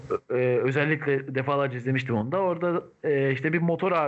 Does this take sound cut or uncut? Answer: uncut